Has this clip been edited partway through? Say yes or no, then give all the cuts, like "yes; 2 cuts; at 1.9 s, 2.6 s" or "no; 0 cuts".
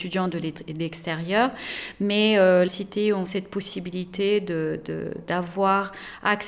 yes; 2 cuts; at 2.7 s, 3.3 s